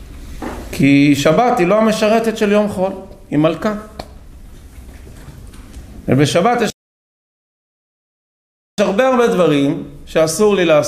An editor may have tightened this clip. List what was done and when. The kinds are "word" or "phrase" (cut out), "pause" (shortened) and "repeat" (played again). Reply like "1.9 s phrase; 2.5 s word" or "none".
none